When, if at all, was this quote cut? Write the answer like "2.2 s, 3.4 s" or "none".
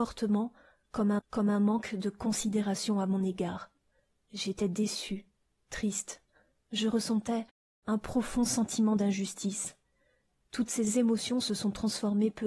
1.2 s